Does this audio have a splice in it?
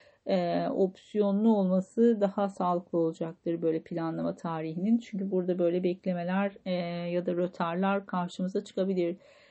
no; 0 cuts

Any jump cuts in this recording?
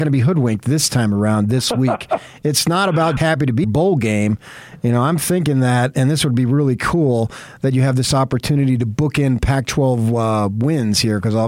yes; 2 cuts; at 3.2 s, 3.6 s

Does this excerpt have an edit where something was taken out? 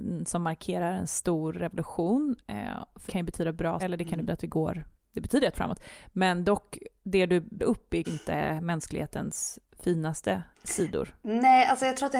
yes; 8 cuts; at 2.4 s, 3.1 s, 3.8 s, 4.3 s, 5.5 s, 7.6 s, 8.0 s, 10.5 s

